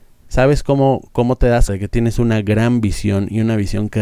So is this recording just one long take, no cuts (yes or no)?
no